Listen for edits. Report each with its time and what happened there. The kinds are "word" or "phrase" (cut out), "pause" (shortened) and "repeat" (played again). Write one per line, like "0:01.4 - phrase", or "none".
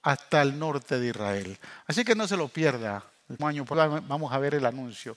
0:03.4 - word
0:03.7 - word

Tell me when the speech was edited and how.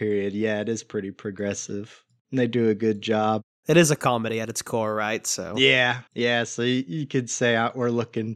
0:06.1 - pause

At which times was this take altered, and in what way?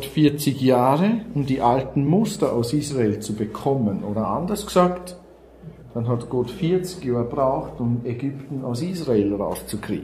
none

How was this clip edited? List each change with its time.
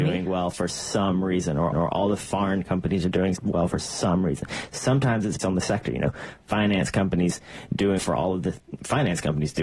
0:01.7 - repeat
0:03.4 - word
0:05.4 - word
0:08.0 - word

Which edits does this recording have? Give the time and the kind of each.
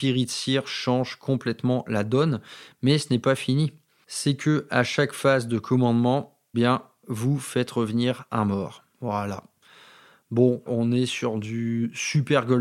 0:06.5 - word
0:10.7 - word

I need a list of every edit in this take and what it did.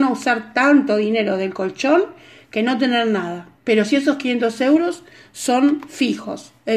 0:03.6 - pause

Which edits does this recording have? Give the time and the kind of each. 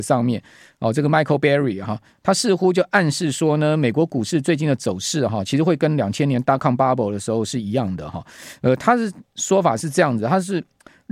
none

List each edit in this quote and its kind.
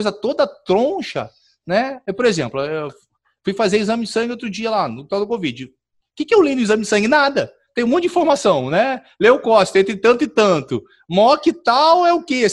none

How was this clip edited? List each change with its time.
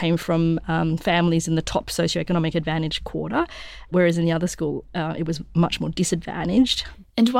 none

